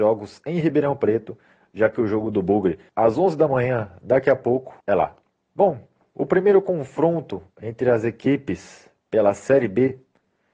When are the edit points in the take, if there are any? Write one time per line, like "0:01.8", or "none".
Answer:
0:02.9
0:04.8
0:05.3